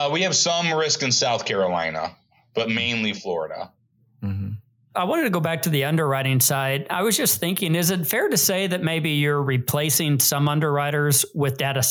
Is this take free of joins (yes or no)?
yes